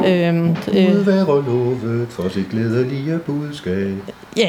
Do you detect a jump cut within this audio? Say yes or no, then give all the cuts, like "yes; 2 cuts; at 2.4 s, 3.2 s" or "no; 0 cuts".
no; 0 cuts